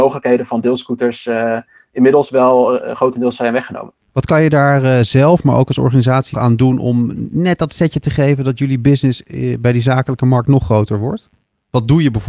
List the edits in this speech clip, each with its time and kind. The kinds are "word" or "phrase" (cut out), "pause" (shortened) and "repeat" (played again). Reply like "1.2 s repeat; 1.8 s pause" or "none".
4.0 s pause; 6.3 s word